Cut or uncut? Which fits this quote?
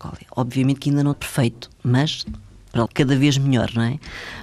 cut